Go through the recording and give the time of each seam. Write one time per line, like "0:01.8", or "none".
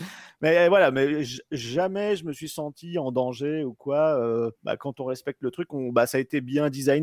0:04.6